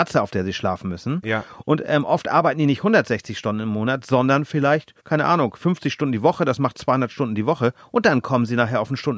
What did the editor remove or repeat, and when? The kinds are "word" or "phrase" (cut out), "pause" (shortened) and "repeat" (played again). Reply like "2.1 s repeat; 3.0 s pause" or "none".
5.0 s pause